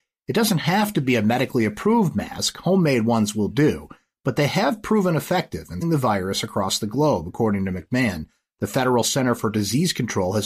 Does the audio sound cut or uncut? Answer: cut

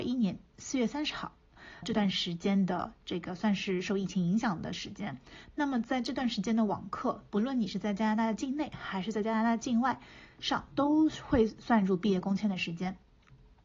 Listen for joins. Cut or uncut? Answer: cut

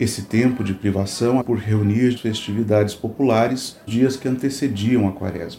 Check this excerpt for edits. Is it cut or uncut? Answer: cut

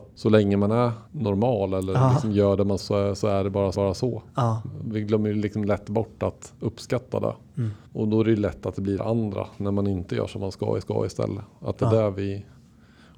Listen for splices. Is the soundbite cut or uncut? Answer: cut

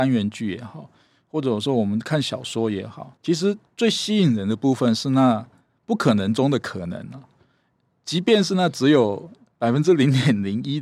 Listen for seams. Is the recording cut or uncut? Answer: cut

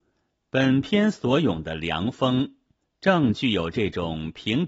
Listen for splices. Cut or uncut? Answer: uncut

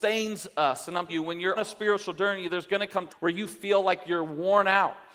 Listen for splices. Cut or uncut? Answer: cut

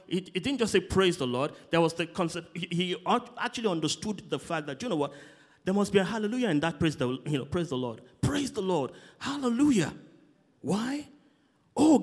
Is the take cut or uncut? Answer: uncut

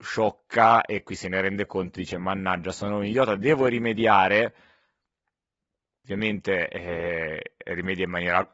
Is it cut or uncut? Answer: uncut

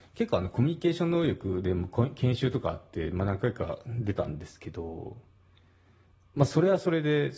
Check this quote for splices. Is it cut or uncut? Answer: uncut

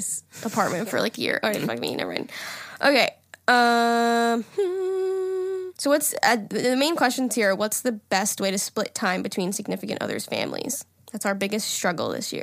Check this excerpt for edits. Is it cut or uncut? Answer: cut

